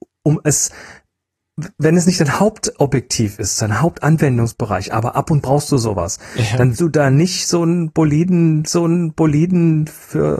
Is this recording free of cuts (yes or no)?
no